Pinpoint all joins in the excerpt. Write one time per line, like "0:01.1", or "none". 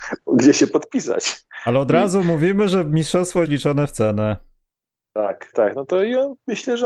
0:03.4
0:05.5